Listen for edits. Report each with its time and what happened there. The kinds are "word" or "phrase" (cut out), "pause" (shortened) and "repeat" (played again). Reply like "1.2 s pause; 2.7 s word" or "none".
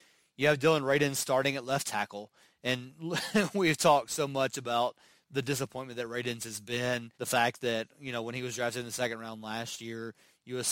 7.1 s pause